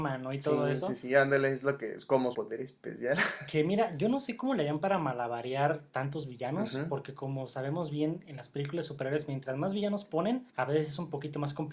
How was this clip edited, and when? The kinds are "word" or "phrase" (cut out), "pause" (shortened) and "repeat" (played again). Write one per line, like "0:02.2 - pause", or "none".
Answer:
0:02.3 - word
0:10.5 - pause